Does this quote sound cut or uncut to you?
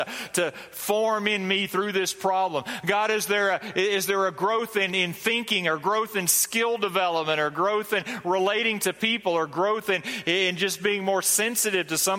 uncut